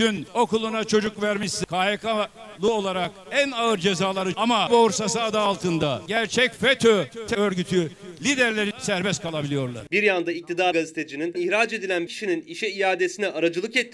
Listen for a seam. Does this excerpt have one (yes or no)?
yes